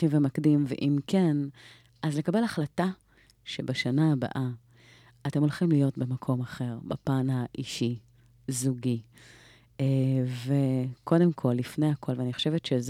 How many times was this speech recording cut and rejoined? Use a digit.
0